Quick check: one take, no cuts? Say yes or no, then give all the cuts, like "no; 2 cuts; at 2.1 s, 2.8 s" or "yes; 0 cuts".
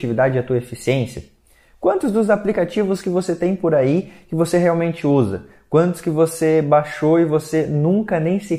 yes; 0 cuts